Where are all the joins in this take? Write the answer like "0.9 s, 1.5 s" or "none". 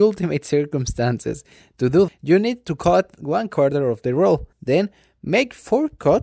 2.1 s, 4.5 s